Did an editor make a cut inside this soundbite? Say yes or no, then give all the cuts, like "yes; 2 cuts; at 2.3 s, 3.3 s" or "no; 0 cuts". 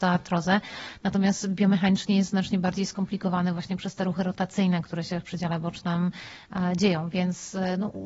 no; 0 cuts